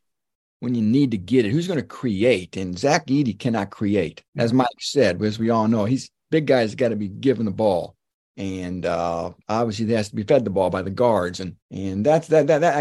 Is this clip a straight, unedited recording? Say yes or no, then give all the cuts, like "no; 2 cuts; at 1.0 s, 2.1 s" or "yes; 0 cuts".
no; 4 cuts; at 4.3 s, 8.1 s, 9.4 s, 11.6 s